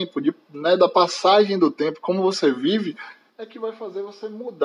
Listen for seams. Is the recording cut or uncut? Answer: uncut